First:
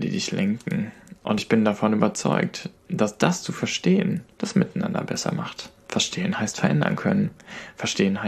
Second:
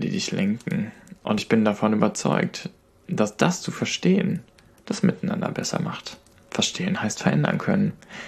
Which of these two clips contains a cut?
first; 3 cuts; at 2.8 s, 4.3 s, 5.8 s

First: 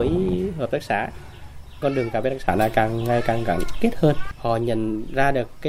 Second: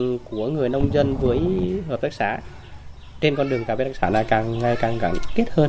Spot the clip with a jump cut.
first; 1 cut; at 1.8 s

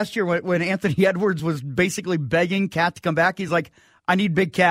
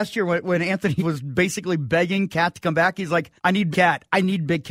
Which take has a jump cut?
second; 3 cuts; at 1.0 s, 3.4 s, 3.7 s

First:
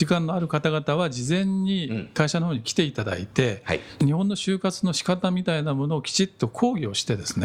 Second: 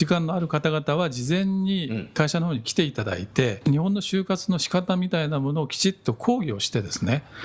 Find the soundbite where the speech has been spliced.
second; 1 cut; at 3.6 s

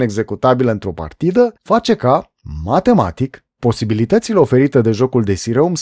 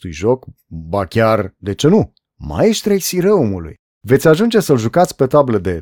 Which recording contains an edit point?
first; 2 cuts; at 1.6 s, 3.5 s

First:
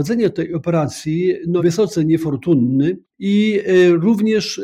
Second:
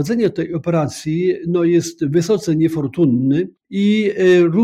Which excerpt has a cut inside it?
first; 1 cut; at 1.6 s

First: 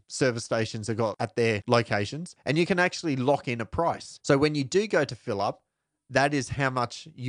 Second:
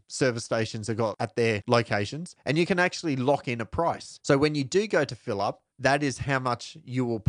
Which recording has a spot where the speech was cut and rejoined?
second; 1 cut; at 5.7 s

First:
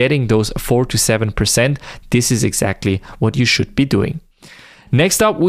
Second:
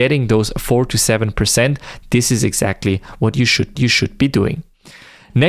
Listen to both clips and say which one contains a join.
second; 1 cut; at 3.8 s

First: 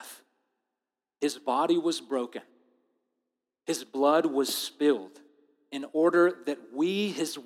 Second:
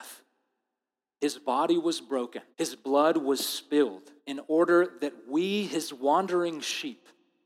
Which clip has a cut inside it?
second; 2 cuts; at 2.5 s, 4.2 s

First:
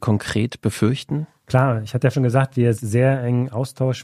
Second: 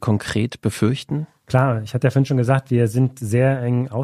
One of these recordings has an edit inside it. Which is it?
first; 2 cuts; at 2.1 s, 2.8 s

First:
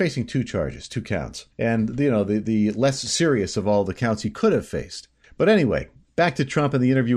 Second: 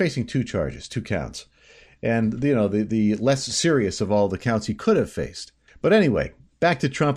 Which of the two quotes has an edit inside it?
first; 1 cut; at 1.5 s

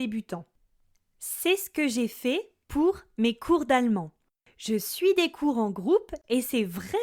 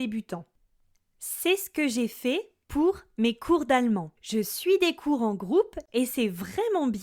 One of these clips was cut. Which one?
second; 1 cut; at 4.2 s

